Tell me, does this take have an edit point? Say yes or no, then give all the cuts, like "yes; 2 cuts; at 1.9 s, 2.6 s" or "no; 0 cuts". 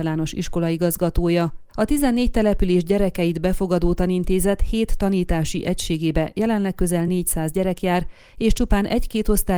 no; 0 cuts